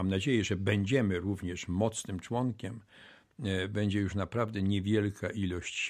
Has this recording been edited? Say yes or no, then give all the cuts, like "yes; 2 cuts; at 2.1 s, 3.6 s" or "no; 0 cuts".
no; 0 cuts